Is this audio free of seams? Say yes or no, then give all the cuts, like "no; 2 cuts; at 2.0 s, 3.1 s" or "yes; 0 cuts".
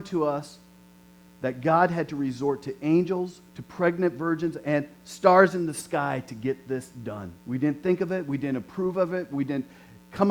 no; 2 cuts; at 3.5 s, 7.4 s